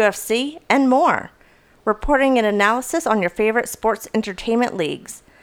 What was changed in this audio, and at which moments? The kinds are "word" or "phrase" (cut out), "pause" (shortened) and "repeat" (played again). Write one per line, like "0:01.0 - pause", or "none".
none